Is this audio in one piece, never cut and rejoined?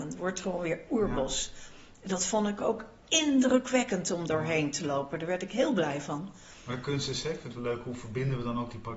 yes; 0 cuts

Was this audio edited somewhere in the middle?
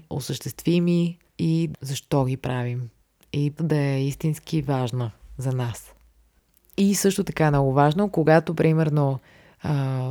yes; 3 cuts; at 1.3 s, 1.7 s, 3.6 s

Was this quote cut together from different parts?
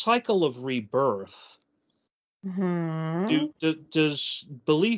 no; 0 cuts

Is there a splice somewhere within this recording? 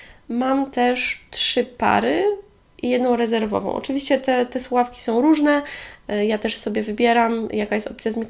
no; 0 cuts

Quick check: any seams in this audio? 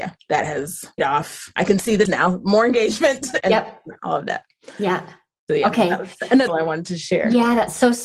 yes; 4 cuts; at 1.0 s, 2.0 s, 3.4 s, 6.5 s

